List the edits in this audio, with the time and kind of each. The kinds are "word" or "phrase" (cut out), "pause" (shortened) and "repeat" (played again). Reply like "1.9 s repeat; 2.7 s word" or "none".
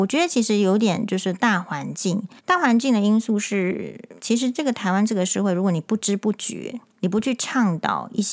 2.4 s pause; 4.2 s pause; 6.9 s pause